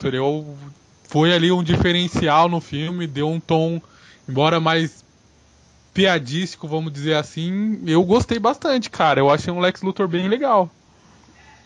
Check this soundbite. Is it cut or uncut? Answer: uncut